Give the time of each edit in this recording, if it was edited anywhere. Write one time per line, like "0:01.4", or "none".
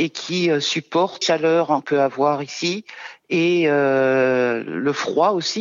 0:01.2
0:01.8